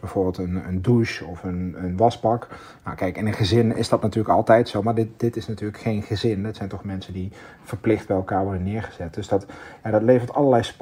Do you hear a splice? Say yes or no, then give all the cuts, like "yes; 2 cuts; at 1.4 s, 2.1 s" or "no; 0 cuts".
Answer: no; 0 cuts